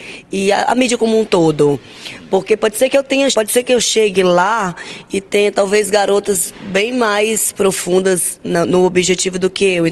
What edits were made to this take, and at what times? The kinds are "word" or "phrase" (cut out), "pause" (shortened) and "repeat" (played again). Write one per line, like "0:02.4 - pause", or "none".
0:03.3 - word